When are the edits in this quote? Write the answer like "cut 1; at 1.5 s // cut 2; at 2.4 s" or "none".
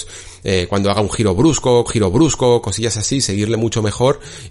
cut 1; at 1.9 s

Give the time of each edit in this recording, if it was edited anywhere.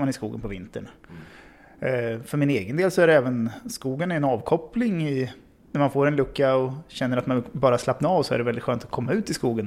none

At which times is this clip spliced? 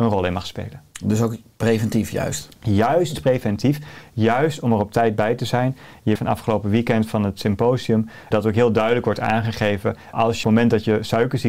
cut 1; at 6.2 s // cut 2; at 8.3 s // cut 3; at 10.1 s // cut 4; at 10.4 s

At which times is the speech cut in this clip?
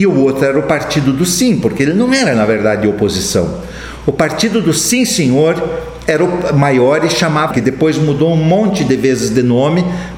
cut 1; at 7.5 s

